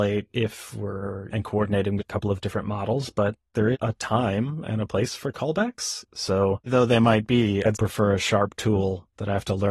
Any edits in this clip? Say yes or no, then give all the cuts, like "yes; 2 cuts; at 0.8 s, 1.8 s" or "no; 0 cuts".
yes; 5 cuts; at 1.3 s, 2.0 s, 3.7 s, 6.7 s, 7.7 s